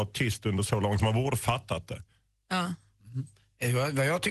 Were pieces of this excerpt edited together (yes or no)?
yes